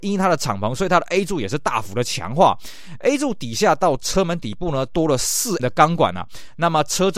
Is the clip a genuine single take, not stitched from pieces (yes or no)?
no